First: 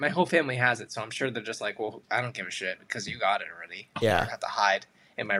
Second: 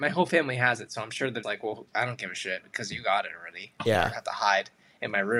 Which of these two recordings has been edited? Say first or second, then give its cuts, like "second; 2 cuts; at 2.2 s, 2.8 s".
second; 1 cut; at 1.4 s